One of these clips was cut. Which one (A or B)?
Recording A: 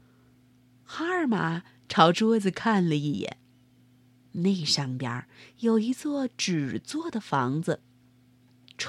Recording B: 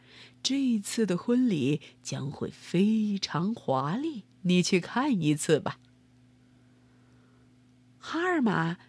B